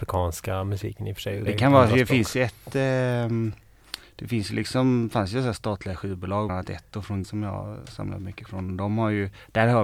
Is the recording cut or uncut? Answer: cut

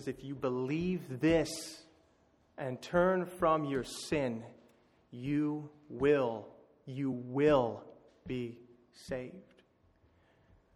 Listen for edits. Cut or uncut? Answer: uncut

